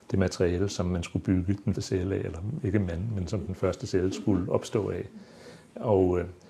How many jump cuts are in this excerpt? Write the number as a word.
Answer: one